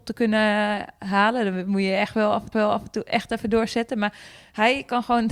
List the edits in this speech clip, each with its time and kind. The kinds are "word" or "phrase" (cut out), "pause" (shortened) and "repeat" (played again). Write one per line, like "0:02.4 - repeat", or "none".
0:02.5 - repeat